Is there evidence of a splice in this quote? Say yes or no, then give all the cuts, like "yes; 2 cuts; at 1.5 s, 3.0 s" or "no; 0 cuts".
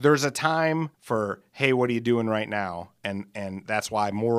yes; 1 cut; at 0.9 s